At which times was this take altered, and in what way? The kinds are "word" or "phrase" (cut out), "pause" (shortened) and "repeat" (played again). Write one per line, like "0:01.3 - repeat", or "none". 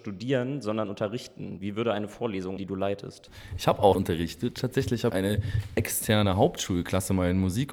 0:02.6 - word
0:03.9 - word
0:05.1 - word